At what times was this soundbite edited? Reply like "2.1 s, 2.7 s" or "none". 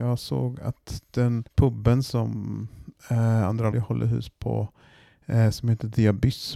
1.5 s, 3.7 s